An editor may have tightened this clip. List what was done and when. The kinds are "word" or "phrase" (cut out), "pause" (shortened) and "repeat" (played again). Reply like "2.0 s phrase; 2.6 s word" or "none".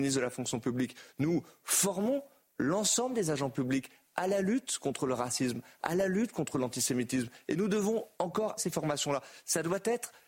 8.6 s word